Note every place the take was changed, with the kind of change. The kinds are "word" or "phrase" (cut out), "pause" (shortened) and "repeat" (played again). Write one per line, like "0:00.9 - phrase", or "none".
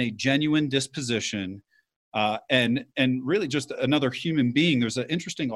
none